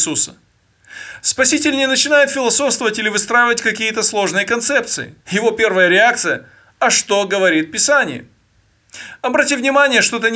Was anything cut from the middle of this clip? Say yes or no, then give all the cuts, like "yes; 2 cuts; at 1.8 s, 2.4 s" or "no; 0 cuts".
yes; 1 cut; at 5.2 s